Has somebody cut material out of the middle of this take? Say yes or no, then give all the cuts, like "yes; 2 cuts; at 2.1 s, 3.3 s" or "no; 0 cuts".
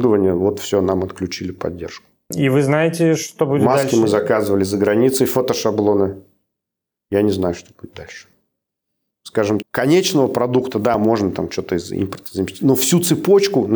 yes; 1 cut; at 9.6 s